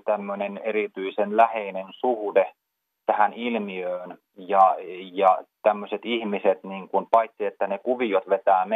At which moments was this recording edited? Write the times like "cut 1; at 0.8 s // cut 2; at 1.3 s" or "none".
none